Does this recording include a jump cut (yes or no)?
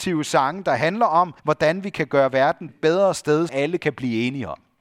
yes